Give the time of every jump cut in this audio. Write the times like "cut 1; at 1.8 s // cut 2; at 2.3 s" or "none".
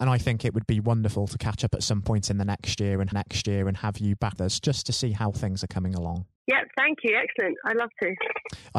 cut 1; at 3.1 s // cut 2; at 4.4 s // cut 3; at 6.4 s